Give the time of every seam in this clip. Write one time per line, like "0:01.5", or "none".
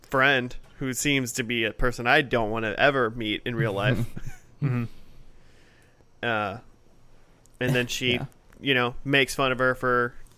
none